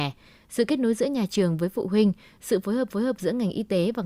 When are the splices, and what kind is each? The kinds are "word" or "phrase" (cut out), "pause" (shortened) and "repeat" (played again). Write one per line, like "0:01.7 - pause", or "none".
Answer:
0:02.9 - repeat